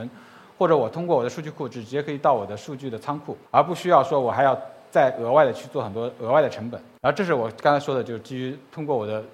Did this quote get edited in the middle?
yes; 1 cut; at 3.5 s

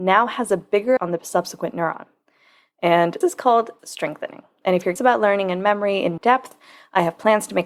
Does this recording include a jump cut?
yes; 5 cuts; at 1.0 s, 3.2 s, 3.8 s, 5.0 s, 6.2 s

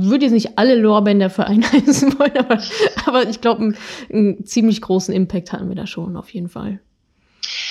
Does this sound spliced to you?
no; 0 cuts

